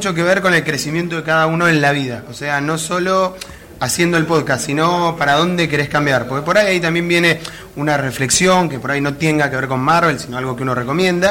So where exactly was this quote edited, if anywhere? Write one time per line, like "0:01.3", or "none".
none